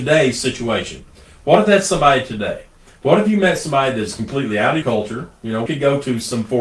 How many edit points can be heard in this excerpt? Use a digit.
2